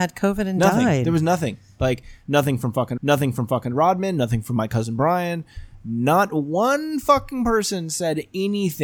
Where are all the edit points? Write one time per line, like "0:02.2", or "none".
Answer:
0:03.0